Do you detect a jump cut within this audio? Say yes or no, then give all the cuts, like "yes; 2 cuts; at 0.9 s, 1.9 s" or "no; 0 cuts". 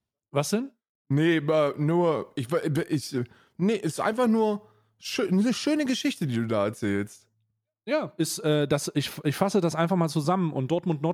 no; 0 cuts